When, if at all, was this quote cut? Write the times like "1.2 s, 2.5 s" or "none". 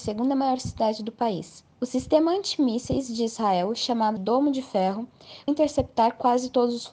1.7 s, 4.2 s, 5.5 s